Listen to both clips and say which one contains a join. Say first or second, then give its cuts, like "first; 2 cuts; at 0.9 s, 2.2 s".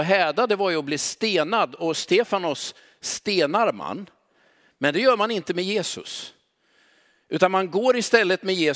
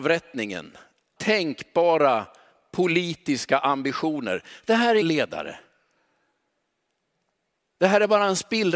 second; 2 cuts; at 1.2 s, 5.0 s